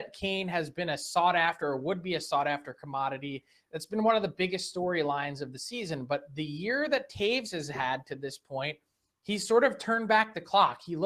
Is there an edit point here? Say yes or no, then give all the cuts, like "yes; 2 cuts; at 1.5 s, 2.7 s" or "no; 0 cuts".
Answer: no; 0 cuts